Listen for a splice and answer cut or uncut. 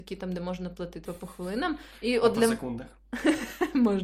cut